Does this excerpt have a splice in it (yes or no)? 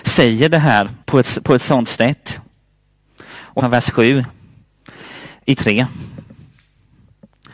yes